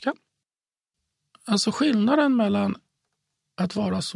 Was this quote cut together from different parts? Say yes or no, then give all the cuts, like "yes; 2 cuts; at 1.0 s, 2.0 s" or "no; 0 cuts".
no; 0 cuts